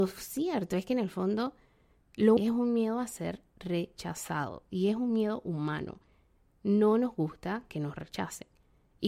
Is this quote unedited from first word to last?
no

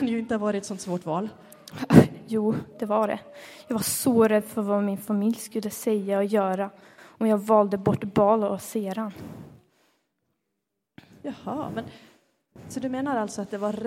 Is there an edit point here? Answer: no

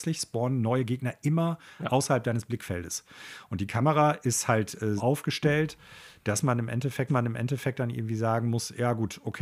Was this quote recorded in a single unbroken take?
no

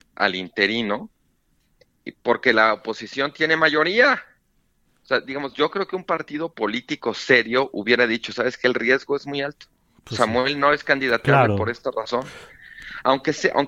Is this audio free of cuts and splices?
yes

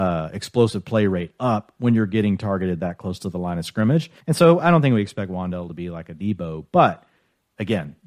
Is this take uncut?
no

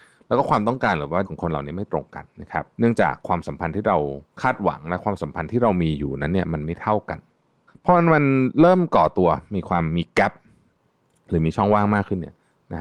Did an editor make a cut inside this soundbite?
yes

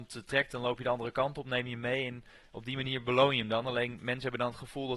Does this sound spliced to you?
no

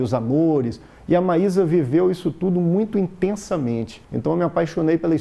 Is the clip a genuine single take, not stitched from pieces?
no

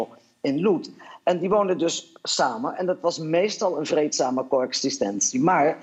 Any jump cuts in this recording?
no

